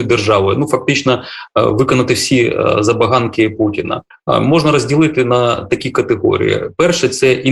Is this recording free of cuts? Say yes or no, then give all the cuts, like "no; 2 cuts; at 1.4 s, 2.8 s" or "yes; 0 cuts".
yes; 0 cuts